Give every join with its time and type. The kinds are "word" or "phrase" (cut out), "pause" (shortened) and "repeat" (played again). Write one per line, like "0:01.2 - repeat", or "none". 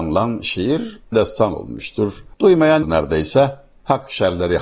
0:01.1 - word
0:02.8 - word